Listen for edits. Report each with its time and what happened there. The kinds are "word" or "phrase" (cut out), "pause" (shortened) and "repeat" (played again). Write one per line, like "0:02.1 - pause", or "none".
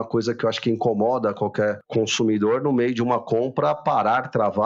none